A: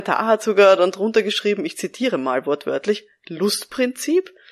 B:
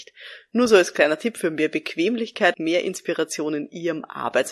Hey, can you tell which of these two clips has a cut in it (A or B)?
B